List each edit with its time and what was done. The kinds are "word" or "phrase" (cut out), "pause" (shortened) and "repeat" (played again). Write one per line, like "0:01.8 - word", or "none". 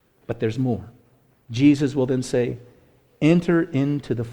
none